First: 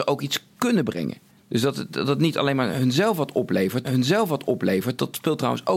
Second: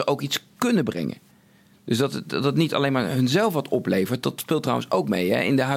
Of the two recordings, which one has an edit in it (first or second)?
first